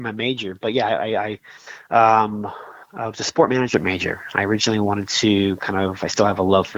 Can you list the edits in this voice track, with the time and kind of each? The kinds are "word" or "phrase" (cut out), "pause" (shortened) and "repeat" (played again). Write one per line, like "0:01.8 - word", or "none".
none